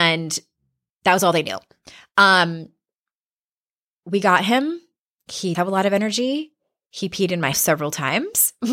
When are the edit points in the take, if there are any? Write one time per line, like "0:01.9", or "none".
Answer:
0:05.5
0:07.5